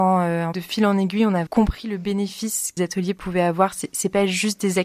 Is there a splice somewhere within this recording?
yes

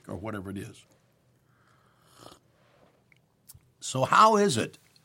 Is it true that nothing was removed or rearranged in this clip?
yes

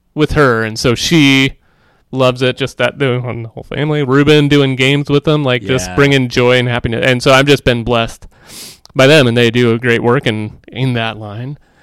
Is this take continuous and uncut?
yes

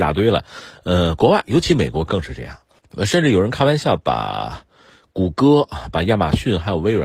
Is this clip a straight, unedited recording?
yes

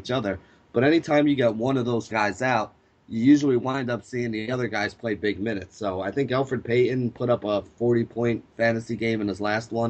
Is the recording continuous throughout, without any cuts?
no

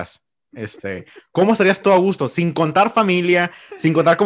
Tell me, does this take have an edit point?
no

